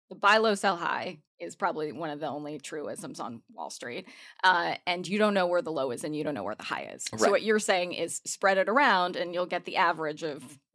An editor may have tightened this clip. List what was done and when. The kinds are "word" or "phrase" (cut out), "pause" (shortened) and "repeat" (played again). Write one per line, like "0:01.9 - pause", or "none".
0:01.3 - pause